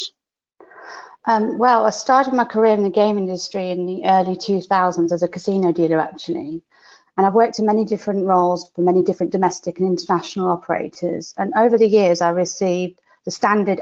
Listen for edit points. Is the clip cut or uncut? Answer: uncut